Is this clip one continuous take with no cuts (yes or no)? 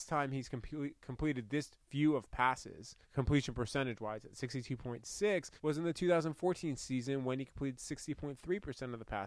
no